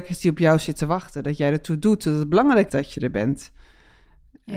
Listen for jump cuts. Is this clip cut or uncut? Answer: cut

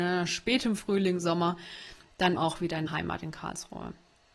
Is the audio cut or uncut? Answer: cut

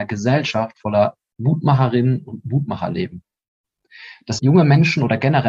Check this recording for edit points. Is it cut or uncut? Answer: cut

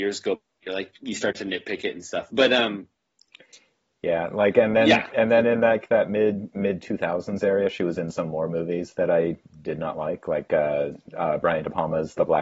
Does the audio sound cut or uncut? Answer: uncut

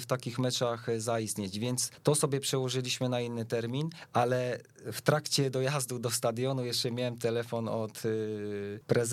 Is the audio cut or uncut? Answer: uncut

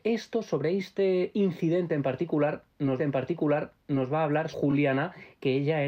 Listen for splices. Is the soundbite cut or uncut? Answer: cut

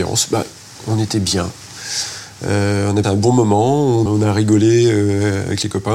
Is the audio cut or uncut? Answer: cut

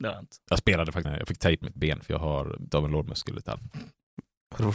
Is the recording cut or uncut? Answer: cut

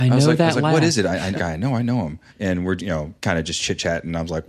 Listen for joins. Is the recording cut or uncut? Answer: cut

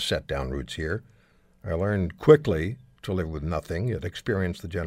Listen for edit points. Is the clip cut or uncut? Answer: uncut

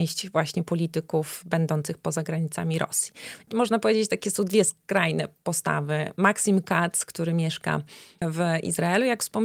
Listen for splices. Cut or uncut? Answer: uncut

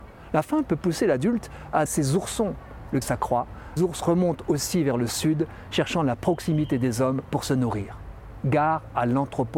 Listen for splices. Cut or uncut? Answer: cut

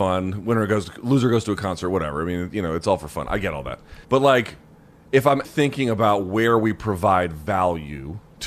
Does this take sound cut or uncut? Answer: cut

